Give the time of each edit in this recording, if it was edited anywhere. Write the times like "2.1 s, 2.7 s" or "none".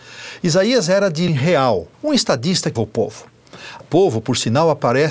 1.3 s, 1.9 s, 2.8 s, 3.8 s